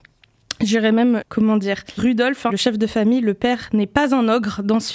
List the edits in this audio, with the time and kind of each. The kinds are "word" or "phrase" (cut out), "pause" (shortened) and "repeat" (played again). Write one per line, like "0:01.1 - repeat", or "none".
0:01.2 - phrase
0:02.0 - word
0:02.5 - word